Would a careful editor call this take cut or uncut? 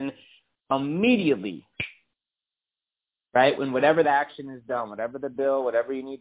cut